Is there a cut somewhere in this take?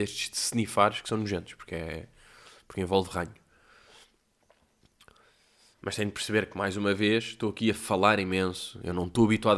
no; 0 cuts

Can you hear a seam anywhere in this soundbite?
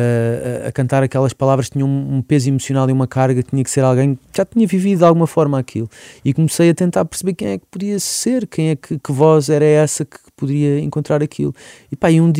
no; 0 cuts

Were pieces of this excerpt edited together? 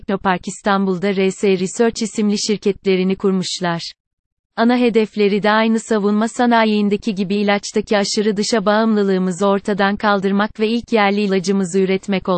no; 0 cuts

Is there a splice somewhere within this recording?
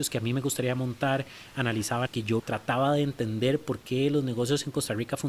yes; 2 cuts; at 2.1 s, 2.4 s

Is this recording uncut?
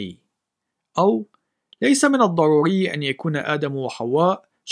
yes; 0 cuts

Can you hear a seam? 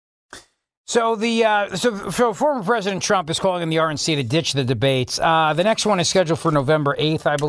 no; 0 cuts

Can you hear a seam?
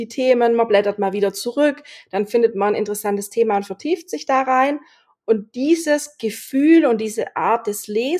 no; 0 cuts

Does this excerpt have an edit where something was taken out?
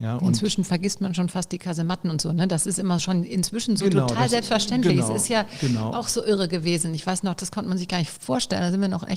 no; 0 cuts

